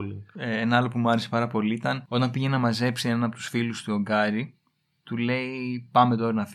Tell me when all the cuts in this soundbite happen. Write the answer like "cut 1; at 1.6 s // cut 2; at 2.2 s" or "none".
none